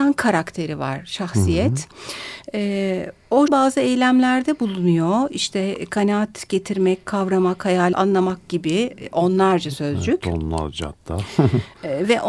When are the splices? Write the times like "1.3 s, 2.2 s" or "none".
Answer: 3.5 s, 7.9 s